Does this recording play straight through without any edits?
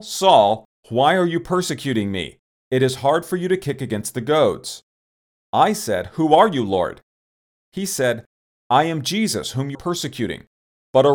no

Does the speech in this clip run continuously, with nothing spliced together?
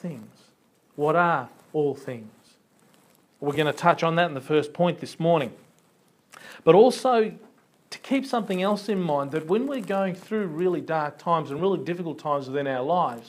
yes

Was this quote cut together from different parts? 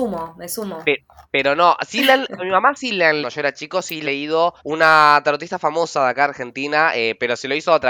yes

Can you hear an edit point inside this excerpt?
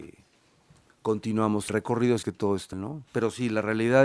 yes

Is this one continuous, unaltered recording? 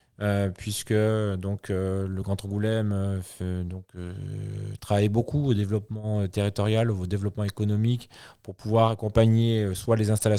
yes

